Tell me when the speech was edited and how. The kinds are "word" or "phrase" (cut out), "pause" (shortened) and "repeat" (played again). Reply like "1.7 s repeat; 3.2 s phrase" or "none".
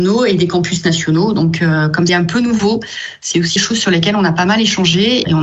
2.1 s word; 3.6 s word